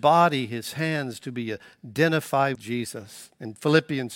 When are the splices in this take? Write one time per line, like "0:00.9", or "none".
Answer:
0:02.5

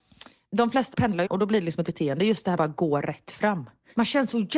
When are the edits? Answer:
0:00.9
0:01.3
0:01.9
0:02.6

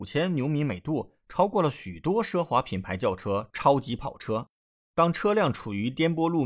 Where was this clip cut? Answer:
none

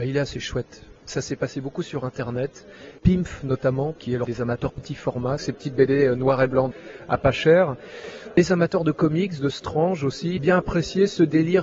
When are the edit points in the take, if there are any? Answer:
0:01.0
0:04.3
0:04.7
0:10.4

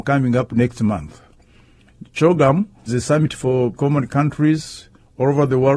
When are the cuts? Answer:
0:02.9
0:03.7

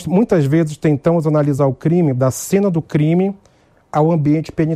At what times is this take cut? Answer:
none

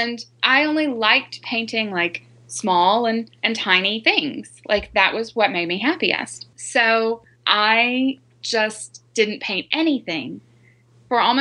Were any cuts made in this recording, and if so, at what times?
0:03.4
0:09.1

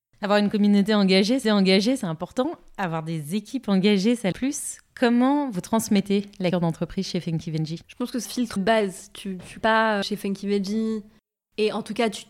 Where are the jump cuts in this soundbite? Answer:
0:01.4
0:04.3
0:06.5
0:07.8
0:08.2
0:08.6
0:09.6
0:10.0

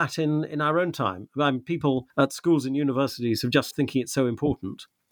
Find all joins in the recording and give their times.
0:02.1
0:03.7

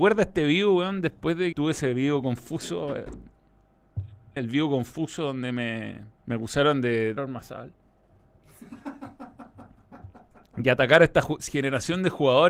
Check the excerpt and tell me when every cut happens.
0:01.5
0:04.4
0:06.2
0:07.2

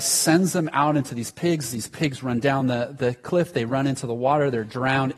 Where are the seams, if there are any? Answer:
none

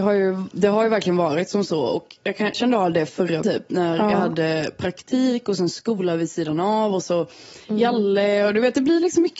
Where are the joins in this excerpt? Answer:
0:02.5
0:03.4
0:07.6

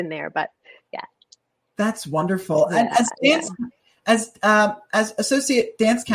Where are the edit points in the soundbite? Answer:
none

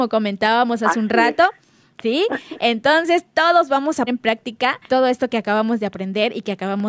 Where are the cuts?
0:04.1
0:04.9

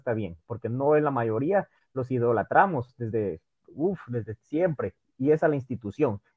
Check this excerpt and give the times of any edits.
none

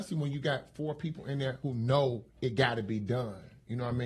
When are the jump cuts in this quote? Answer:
0:02.3

